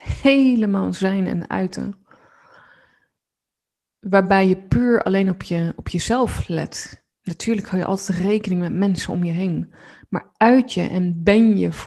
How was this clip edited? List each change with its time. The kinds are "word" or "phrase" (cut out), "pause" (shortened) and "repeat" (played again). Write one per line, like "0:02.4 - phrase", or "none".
0:07.1 - pause